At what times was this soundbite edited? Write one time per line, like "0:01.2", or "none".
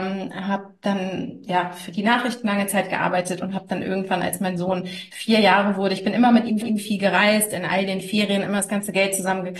0:06.6

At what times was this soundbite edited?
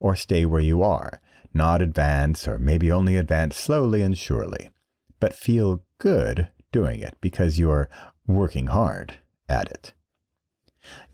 none

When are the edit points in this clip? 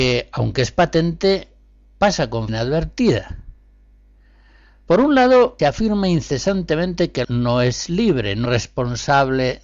0:02.5
0:05.6
0:07.2
0:08.5

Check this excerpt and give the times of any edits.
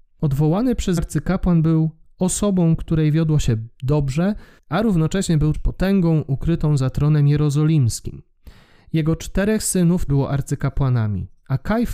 0:01.0
0:04.6
0:05.5
0:10.1

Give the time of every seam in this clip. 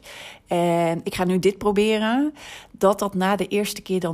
none

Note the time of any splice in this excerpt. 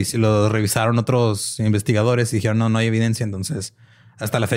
none

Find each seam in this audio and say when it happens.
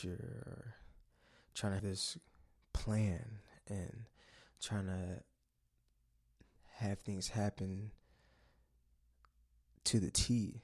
0:01.8

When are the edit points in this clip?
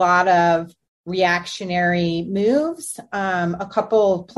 none

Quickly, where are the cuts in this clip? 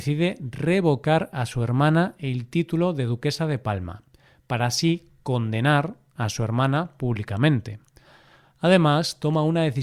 none

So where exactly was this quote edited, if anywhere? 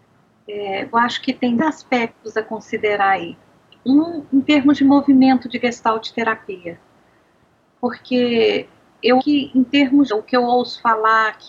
0:00.9
0:01.6
0:09.2
0:10.1

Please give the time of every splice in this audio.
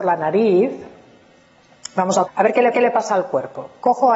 0:02.3
0:02.7

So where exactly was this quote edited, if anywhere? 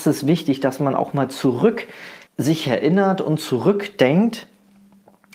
0:02.3

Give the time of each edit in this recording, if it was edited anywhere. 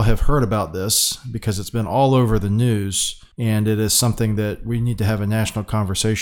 0:03.3

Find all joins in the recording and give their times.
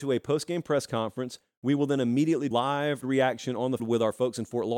0:02.5
0:03.0
0:03.8

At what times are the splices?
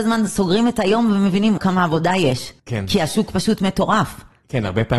0:01.6
0:02.6

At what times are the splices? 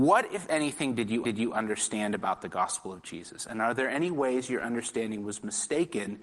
0:01.2

